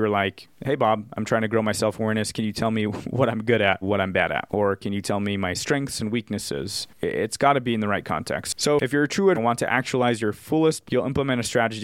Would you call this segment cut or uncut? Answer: cut